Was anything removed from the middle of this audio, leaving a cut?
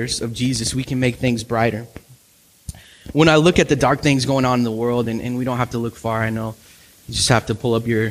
no; 0 cuts

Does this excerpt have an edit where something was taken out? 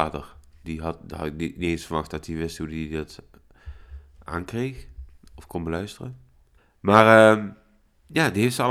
yes; 1 cut; at 6.6 s

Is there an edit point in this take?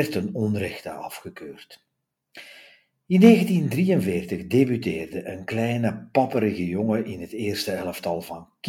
no; 0 cuts

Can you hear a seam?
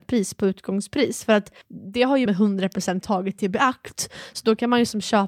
yes; 3 cuts; at 1.6 s, 2.3 s, 3.0 s

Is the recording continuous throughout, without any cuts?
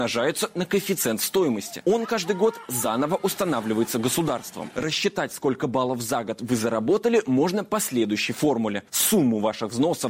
no; 1 cut; at 8.9 s

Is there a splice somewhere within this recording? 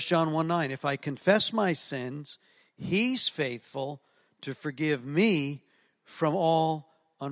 no; 0 cuts

